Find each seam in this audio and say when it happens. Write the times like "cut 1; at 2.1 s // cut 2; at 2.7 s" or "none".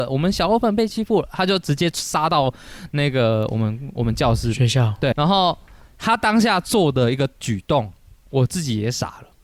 cut 1; at 5.1 s